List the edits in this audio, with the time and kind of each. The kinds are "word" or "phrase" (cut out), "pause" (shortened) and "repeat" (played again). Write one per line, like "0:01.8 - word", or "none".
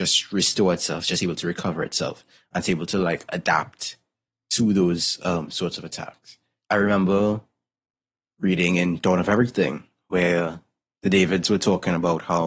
none